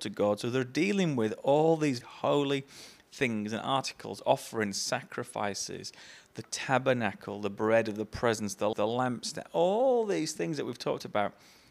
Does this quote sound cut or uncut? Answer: cut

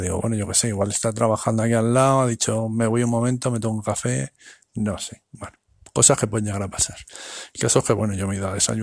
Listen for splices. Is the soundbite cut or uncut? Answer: uncut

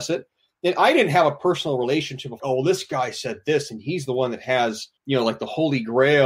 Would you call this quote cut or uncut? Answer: cut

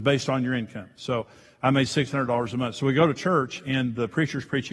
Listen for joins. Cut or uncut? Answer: uncut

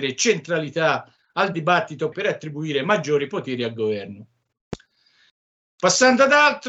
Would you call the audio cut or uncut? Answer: cut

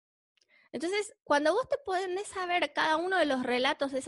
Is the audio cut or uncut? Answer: cut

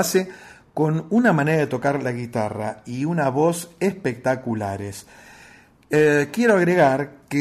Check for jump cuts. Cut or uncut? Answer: uncut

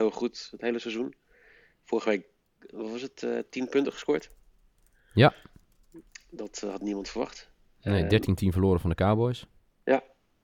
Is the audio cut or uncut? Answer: uncut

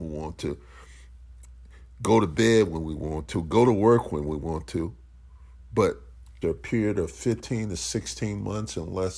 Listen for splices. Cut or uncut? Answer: cut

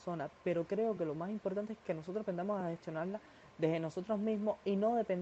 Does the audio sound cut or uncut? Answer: uncut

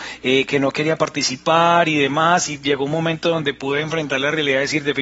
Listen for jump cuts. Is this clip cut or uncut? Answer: uncut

